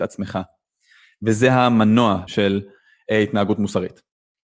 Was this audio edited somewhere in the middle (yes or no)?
yes